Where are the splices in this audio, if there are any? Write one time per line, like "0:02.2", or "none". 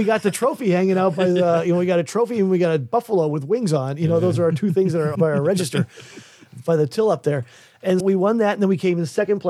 0:05.1
0:08.0